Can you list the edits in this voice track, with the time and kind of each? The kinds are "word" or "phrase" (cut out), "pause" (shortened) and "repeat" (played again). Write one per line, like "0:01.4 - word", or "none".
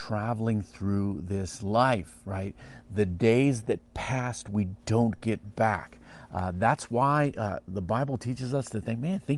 none